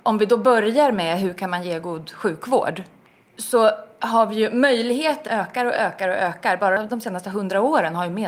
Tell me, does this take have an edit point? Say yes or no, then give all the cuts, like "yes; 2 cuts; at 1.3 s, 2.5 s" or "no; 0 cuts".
yes; 1 cut; at 5.3 s